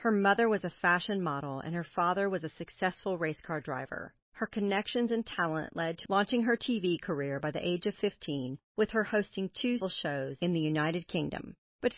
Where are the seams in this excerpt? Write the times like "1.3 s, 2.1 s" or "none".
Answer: 6.1 s, 9.8 s